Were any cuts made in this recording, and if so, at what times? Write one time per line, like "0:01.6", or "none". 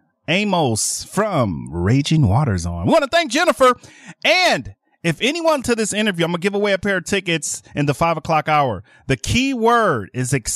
0:05.6